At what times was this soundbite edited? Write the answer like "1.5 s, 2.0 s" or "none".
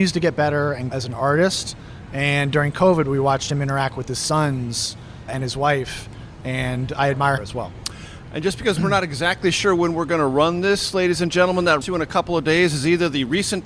0.9 s, 5.3 s, 7.4 s, 11.8 s